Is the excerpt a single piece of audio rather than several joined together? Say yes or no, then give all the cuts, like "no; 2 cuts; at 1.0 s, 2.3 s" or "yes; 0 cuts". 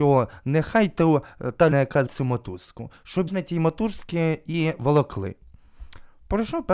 no; 3 cuts; at 1.7 s, 2.1 s, 3.3 s